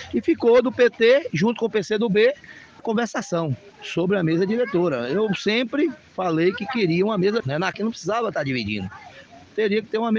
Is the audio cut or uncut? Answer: cut